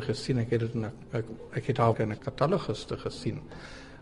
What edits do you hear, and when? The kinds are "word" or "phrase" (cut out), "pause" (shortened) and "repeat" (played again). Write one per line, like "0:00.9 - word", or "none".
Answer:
0:01.9 - word